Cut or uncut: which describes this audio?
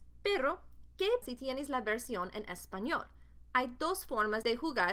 cut